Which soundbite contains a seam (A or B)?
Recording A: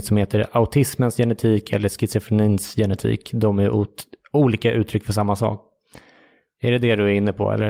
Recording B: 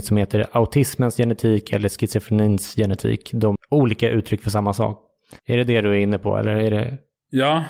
B